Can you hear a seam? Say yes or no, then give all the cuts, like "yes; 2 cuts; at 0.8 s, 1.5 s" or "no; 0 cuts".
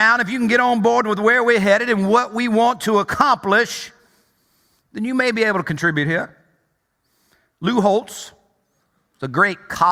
no; 0 cuts